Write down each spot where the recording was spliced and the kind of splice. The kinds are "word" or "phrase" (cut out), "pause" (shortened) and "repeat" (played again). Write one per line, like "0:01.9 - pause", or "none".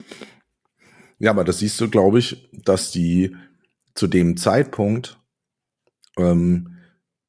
none